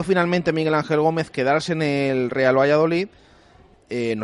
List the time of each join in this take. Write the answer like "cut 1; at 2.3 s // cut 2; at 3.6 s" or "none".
none

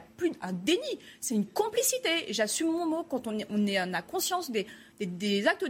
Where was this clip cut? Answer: none

